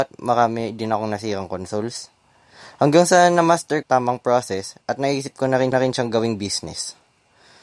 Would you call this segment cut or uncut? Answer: cut